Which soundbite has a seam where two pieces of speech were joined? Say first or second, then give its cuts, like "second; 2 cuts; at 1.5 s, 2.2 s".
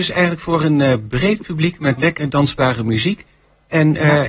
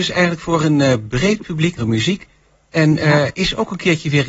second; 1 cut; at 1.8 s